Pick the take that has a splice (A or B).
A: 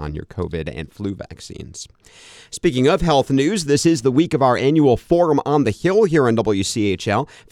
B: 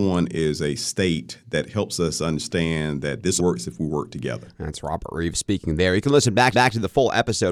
B